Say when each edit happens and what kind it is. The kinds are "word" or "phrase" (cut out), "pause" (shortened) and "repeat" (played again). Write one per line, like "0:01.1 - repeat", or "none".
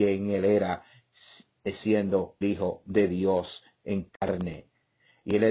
0:02.4 - word